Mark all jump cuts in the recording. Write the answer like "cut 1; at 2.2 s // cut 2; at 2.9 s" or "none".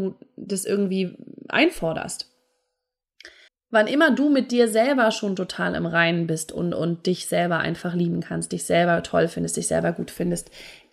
cut 1; at 3.5 s